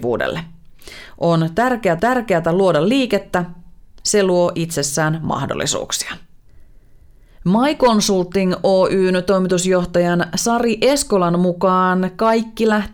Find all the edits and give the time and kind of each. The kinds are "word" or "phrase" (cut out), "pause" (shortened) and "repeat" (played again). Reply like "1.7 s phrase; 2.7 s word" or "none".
2.0 s repeat